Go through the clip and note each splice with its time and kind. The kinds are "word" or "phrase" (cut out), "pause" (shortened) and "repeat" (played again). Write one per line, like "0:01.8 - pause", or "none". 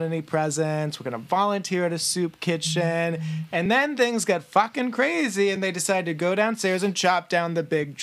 none